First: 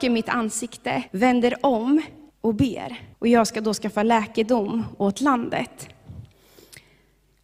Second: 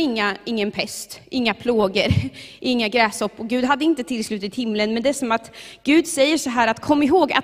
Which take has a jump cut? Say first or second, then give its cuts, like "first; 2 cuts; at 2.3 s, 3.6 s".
first; 3 cuts; at 1.1 s, 2.3 s, 3.1 s